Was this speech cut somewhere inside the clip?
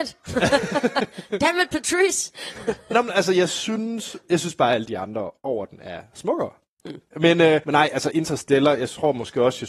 yes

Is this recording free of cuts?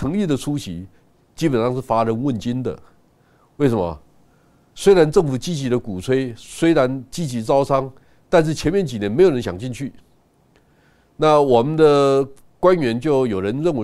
yes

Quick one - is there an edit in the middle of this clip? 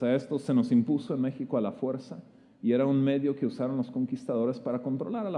no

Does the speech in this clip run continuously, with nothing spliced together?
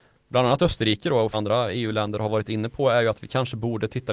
no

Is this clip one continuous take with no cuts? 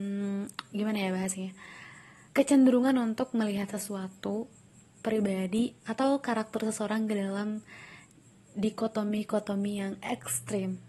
no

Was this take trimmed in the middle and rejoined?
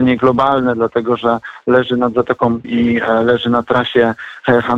yes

